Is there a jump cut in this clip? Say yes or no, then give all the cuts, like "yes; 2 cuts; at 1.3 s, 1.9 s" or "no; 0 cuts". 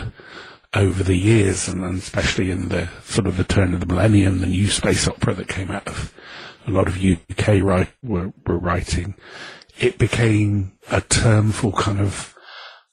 yes; 1 cut; at 10.8 s